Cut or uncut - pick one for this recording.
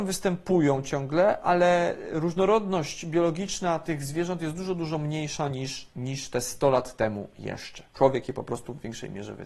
cut